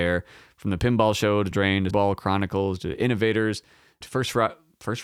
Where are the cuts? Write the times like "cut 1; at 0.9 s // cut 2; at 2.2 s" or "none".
cut 1; at 1.5 s // cut 2; at 1.9 s // cut 3; at 4.0 s